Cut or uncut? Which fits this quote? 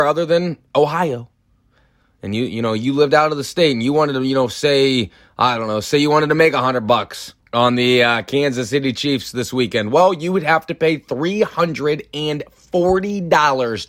cut